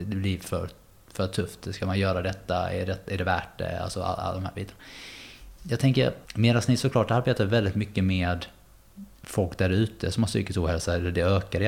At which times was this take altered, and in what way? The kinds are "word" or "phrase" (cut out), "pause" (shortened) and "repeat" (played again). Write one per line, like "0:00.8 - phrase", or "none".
0:06.2 - pause
0:09.1 - pause

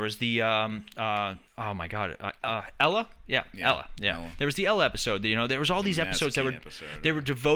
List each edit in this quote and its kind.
0:01.5 - pause

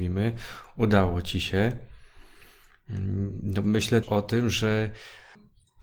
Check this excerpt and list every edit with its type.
0:04.0 - word

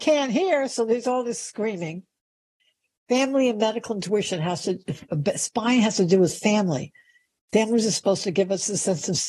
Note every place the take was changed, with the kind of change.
0:02.6 - pause

